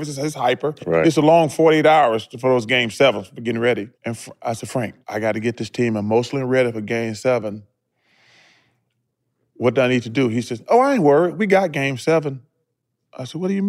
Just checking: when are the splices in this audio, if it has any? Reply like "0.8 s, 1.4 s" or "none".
3.9 s, 5.0 s